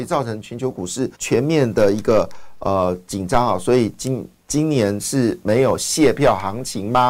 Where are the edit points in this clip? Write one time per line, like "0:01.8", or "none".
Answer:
0:01.1